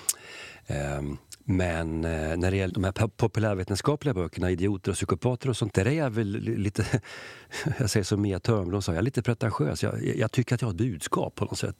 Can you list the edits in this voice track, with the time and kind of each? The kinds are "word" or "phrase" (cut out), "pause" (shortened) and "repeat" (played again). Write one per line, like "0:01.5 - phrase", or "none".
0:02.7 - word
0:05.7 - word